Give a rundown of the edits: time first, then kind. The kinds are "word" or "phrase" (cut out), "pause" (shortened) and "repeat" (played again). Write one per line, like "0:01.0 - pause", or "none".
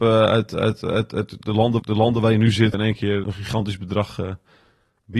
0:01.8 - repeat
0:02.7 - word
0:03.2 - word